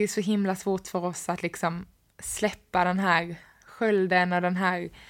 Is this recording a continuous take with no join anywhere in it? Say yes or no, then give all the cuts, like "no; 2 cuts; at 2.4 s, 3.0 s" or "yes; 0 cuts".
yes; 0 cuts